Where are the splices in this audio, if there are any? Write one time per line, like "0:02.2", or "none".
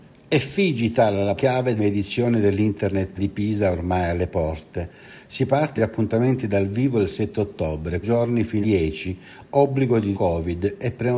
0:01.4
0:01.8
0:03.2
0:05.8
0:08.0
0:08.6
0:10.1